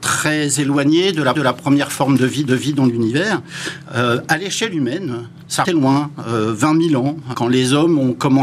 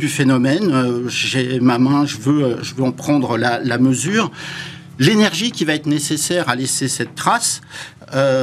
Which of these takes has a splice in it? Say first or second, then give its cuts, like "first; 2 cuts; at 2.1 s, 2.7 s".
first; 4 cuts; at 1.3 s, 2.5 s, 5.6 s, 7.3 s